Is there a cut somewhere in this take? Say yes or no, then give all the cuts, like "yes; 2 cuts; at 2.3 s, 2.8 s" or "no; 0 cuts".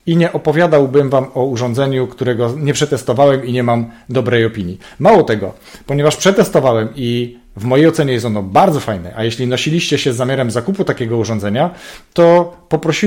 no; 0 cuts